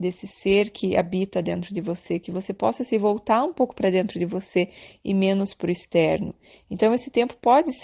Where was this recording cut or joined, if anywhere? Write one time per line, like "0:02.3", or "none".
none